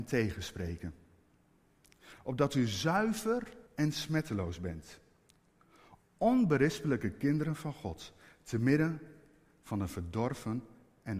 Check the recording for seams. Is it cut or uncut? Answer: cut